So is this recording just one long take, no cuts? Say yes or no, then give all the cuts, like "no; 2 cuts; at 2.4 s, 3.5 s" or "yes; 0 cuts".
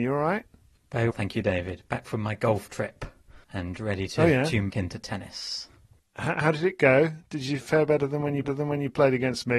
no; 4 cuts; at 1.1 s, 3.4 s, 4.7 s, 8.4 s